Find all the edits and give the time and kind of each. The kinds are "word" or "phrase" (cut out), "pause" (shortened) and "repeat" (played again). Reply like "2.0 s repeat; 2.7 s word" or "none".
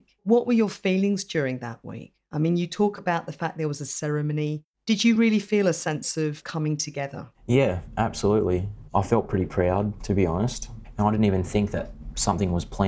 none